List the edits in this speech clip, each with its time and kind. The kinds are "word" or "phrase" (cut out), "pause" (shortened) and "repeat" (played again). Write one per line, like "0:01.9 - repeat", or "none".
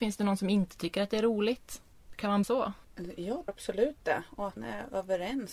0:02.4 - word
0:03.5 - word
0:04.6 - word